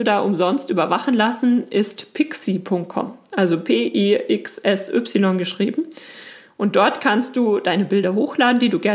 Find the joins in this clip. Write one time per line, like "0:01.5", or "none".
none